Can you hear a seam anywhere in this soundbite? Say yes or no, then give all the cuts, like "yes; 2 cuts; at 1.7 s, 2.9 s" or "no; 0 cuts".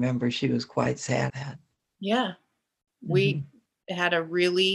yes; 1 cut; at 1.3 s